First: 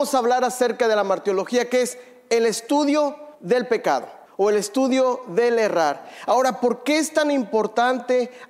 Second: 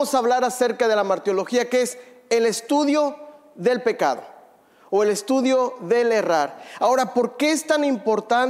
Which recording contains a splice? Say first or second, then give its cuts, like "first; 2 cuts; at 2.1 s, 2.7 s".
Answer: first; 2 cuts; at 3.3 s, 4.3 s